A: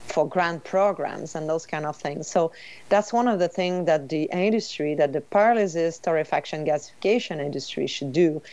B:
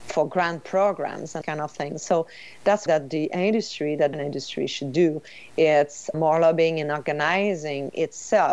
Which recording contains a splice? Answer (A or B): B